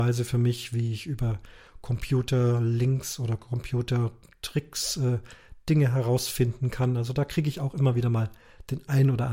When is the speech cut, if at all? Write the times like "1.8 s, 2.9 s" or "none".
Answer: none